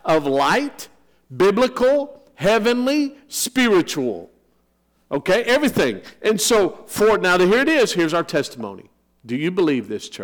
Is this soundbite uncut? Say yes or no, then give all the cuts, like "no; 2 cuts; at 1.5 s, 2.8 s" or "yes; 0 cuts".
yes; 0 cuts